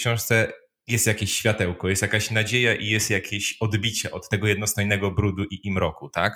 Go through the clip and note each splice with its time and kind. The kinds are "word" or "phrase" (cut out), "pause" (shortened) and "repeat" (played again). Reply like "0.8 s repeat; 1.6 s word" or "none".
none